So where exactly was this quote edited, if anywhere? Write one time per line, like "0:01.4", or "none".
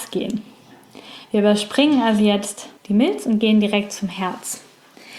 0:02.8